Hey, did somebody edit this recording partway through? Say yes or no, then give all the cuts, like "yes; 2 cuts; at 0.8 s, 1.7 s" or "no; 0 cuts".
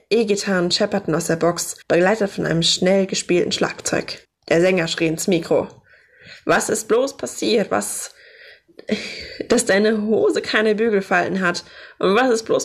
yes; 2 cuts; at 1.8 s, 4.2 s